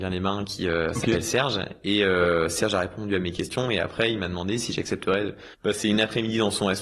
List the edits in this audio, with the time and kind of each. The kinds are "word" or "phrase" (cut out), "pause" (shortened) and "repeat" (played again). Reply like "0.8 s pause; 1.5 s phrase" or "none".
5.5 s pause